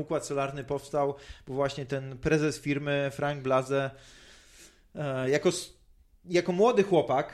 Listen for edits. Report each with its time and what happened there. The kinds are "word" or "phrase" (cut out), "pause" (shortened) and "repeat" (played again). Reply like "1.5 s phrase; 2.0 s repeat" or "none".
none